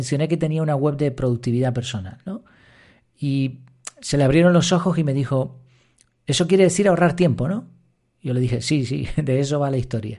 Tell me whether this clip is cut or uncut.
uncut